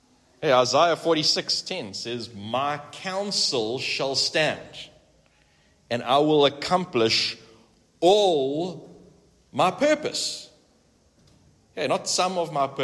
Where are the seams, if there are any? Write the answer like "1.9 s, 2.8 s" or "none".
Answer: none